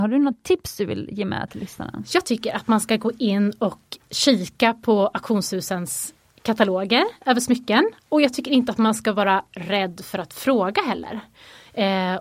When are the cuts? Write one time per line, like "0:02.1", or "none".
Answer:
none